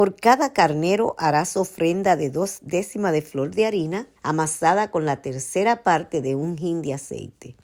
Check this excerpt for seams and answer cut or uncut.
cut